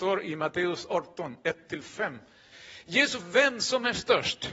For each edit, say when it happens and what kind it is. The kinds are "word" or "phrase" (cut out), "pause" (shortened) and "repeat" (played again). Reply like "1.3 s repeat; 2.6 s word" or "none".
3.2 s word